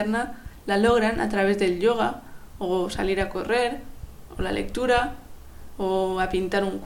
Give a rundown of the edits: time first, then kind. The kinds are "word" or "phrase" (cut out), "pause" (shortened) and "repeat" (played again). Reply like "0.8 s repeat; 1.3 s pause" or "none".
none